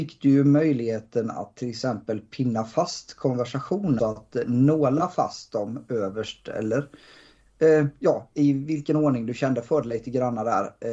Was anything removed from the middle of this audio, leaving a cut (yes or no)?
yes